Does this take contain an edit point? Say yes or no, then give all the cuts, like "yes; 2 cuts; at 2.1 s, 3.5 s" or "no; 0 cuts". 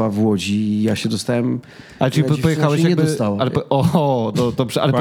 no; 0 cuts